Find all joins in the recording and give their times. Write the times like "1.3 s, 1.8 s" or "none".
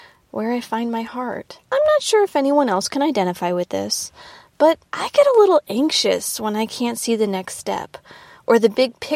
1.6 s, 4.9 s